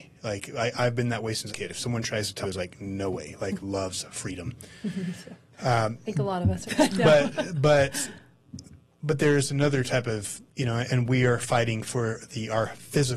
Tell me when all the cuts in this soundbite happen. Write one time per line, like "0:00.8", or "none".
0:01.5
0:02.4
0:03.6
0:06.7
0:08.9
0:10.5
0:10.9